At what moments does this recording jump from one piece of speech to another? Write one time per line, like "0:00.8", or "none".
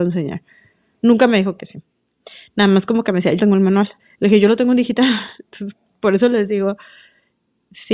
0:03.4
0:04.0